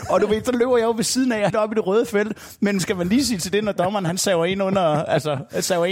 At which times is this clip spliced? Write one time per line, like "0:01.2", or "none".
0:01.5
0:02.8